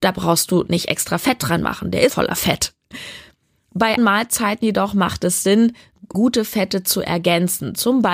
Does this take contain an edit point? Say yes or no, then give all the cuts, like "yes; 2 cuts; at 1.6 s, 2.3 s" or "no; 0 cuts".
yes; 3 cuts; at 2.1 s, 4.0 s, 6.1 s